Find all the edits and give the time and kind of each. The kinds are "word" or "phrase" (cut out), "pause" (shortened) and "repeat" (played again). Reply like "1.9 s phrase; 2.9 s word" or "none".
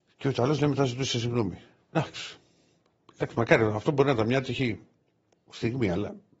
none